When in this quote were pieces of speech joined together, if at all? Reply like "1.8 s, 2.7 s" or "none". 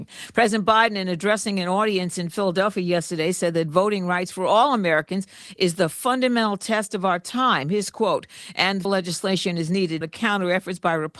8.8 s, 10.0 s